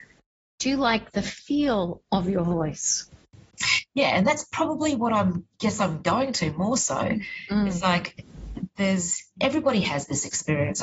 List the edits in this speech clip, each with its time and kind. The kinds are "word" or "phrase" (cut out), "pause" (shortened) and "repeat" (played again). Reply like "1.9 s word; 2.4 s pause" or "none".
none